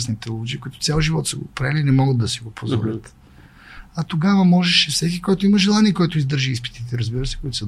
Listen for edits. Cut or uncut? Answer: uncut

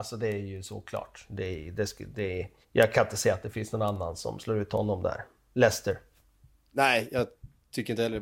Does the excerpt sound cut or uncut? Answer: cut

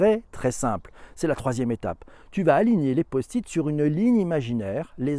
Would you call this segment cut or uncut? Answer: uncut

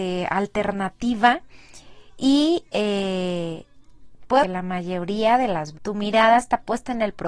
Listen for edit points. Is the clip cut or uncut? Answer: cut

